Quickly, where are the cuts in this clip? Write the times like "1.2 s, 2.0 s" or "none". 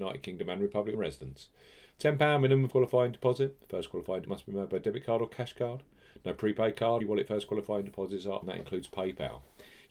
0.9 s, 2.7 s, 4.3 s, 7.0 s, 8.4 s